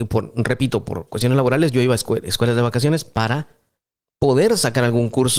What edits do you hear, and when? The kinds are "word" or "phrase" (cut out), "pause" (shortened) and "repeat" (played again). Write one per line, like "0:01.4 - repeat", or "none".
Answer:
none